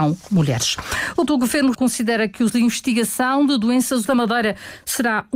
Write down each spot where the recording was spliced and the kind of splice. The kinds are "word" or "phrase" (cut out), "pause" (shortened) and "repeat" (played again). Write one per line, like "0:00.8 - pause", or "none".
0:01.3 - word
0:01.7 - word
0:02.5 - word
0:04.0 - word